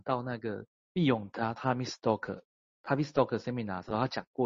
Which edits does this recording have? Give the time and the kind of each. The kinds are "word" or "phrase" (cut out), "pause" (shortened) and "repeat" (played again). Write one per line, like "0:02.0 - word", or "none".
0:02.5 - pause